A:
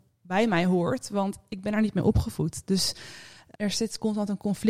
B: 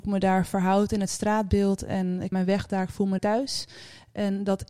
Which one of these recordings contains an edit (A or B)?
B